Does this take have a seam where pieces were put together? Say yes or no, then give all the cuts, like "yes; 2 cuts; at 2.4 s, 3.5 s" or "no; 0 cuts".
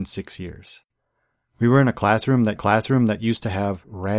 yes; 1 cut; at 2.6 s